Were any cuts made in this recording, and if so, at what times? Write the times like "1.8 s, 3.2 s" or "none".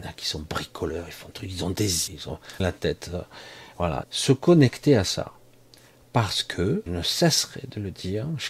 1.3 s, 2.1 s, 2.6 s, 4.0 s, 6.9 s